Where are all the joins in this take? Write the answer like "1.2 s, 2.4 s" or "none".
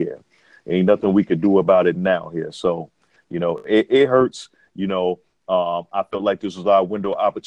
none

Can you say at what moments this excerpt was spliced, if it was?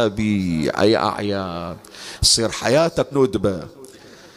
3.1 s

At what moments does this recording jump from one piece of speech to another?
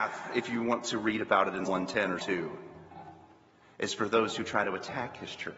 1.7 s, 2.2 s

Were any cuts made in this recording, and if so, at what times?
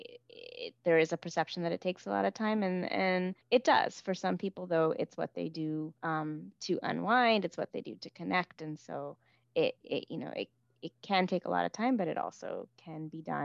3.4 s, 6.0 s

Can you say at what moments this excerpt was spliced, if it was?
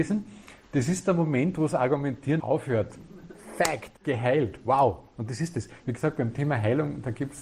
2.4 s, 4.0 s

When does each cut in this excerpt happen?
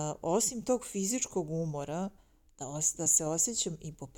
none

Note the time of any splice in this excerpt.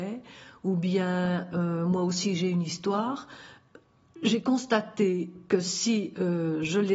none

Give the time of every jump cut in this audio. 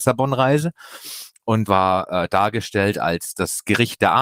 1.7 s

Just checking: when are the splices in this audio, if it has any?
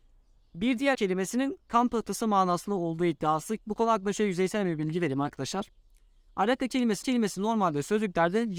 0.9 s, 3.6 s, 7.0 s

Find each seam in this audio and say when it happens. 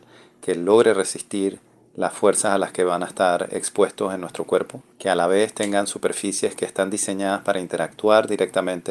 4.9 s

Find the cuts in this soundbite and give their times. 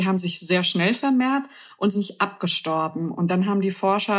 1.9 s

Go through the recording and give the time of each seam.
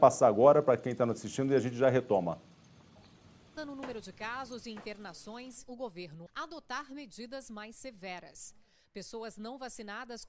3.6 s, 5.6 s, 6.3 s

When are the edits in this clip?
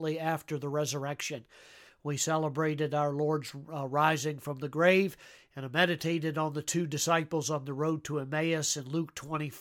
none

